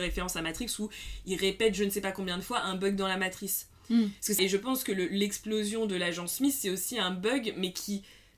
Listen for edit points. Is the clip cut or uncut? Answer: cut